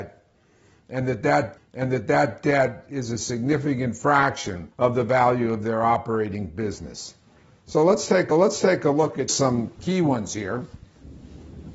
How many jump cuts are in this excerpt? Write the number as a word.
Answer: five